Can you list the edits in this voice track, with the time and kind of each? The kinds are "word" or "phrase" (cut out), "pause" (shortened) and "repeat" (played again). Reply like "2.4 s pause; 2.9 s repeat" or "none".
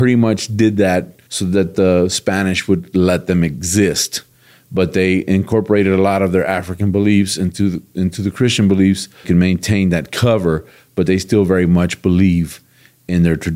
1.3 s pause; 9.2 s phrase